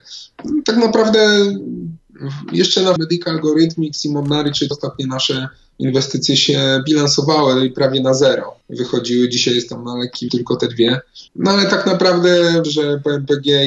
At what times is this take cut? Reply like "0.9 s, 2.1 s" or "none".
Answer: 3.0 s, 4.7 s, 8.6 s, 10.3 s, 11.3 s, 12.6 s

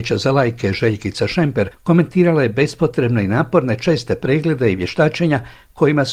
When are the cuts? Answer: none

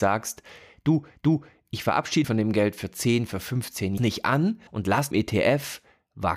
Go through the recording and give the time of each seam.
1.2 s, 2.2 s, 4.0 s, 4.7 s, 5.1 s

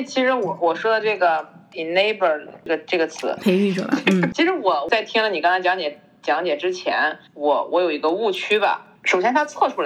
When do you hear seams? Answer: 7.3 s, 9.0 s

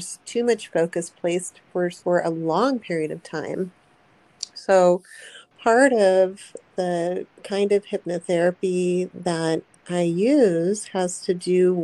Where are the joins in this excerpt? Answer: 2.0 s, 7.3 s

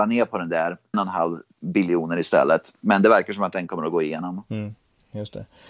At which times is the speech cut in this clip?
0.9 s, 1.6 s

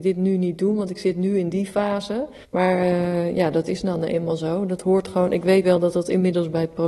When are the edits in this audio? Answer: 2.4 s, 5.6 s

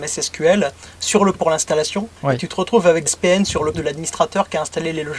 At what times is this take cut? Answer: 1.3 s, 2.2 s, 3.1 s, 3.7 s

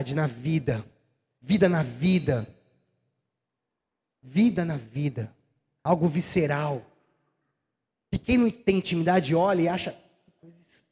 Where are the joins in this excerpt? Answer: none

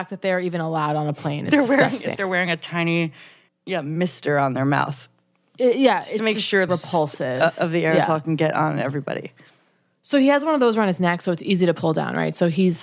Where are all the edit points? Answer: 2.1 s, 3.5 s, 6.7 s

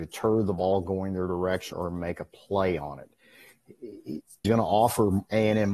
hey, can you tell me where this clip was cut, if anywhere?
1.7 s, 4.4 s

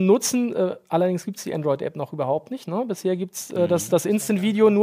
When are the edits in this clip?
none

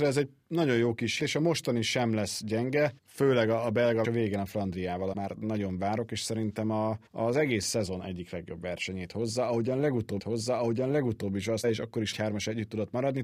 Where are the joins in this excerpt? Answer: 1.2 s, 3.0 s, 4.0 s, 5.1 s, 7.1 s, 10.2 s, 11.6 s, 12.1 s

